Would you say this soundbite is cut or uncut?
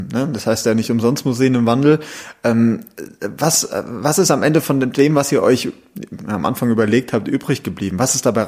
uncut